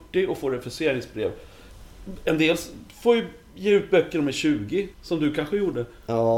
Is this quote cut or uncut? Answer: cut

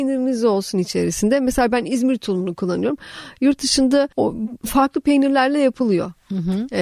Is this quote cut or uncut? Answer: cut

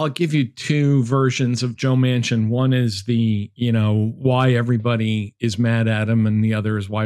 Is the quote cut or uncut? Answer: uncut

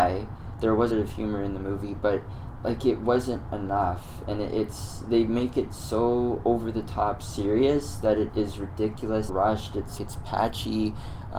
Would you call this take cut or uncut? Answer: cut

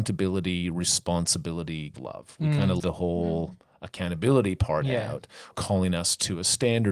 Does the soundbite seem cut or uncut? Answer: cut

